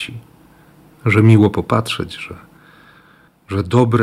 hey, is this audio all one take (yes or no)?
yes